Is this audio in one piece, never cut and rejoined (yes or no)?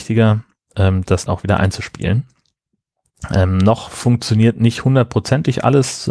no